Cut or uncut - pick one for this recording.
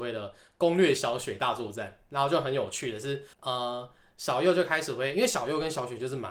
cut